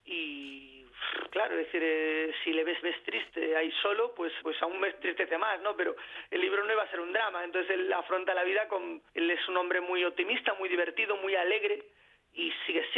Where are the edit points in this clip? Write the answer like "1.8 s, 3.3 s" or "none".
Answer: 2.8 s, 4.4 s, 9.1 s